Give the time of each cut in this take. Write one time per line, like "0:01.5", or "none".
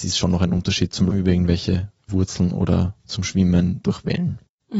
0:01.1
0:02.1
0:03.0